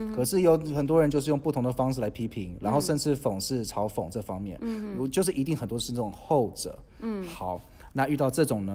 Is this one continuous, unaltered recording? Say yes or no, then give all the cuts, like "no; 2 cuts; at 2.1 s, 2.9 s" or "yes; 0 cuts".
yes; 0 cuts